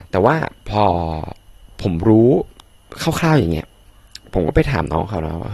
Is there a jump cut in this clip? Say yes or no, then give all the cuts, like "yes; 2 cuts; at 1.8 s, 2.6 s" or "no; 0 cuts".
no; 0 cuts